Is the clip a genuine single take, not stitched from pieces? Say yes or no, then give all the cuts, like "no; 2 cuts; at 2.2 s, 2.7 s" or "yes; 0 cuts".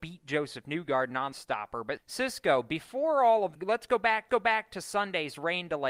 no; 4 cuts; at 1.3 s, 2.0 s, 3.6 s, 4.3 s